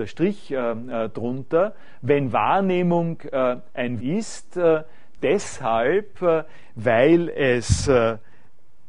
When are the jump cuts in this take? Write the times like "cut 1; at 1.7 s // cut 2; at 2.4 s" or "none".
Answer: cut 1; at 4.0 s // cut 2; at 5.2 s